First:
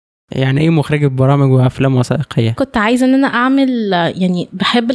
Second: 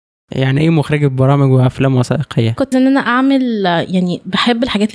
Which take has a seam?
second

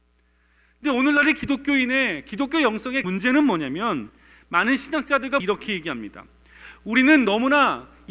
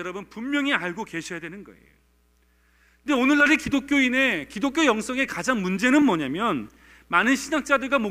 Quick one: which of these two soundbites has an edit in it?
first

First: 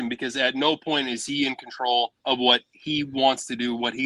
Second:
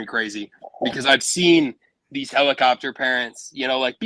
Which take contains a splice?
first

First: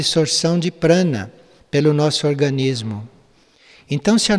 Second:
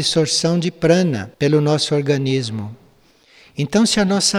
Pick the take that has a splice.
second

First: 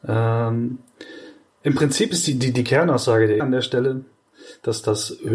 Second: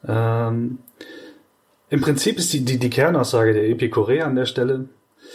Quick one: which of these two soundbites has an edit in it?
first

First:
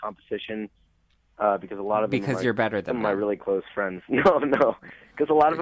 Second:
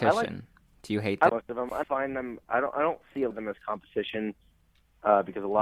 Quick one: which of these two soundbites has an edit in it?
second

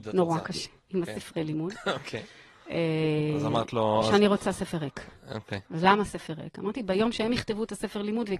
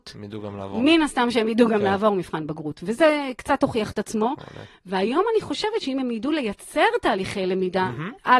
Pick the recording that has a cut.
first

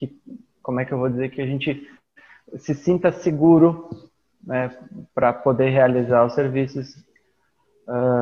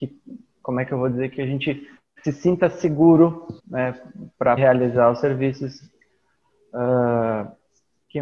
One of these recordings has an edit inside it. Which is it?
second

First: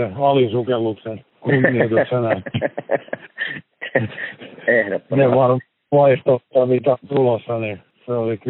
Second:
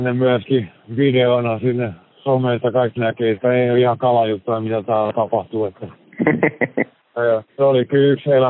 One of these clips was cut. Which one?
second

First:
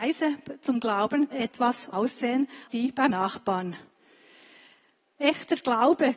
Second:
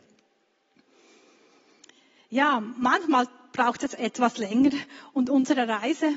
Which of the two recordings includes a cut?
first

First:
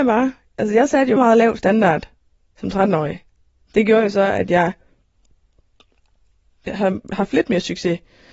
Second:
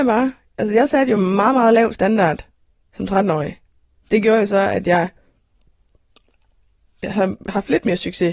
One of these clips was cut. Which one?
first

